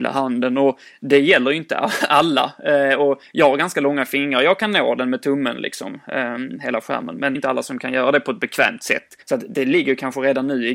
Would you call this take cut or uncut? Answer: cut